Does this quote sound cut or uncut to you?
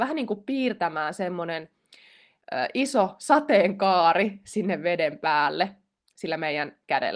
uncut